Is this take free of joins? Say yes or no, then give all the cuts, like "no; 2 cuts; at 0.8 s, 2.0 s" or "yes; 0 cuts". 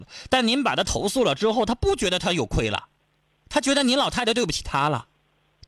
yes; 0 cuts